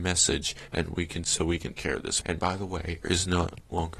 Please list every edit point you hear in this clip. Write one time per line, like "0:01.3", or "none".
0:01.2
0:01.7
0:02.2
0:03.0